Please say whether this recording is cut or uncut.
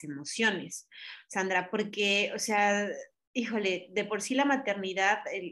uncut